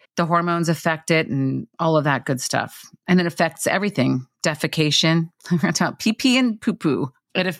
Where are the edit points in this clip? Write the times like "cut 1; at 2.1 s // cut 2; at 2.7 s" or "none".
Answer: cut 1; at 1.7 s